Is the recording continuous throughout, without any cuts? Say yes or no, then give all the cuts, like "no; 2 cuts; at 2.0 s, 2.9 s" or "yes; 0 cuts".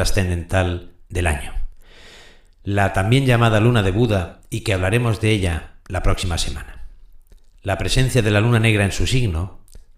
yes; 0 cuts